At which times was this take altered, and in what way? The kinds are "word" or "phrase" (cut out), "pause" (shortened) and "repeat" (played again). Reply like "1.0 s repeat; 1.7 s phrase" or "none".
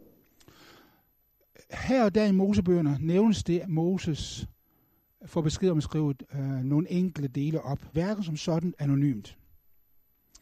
3.6 s word; 7.9 s word; 8.8 s word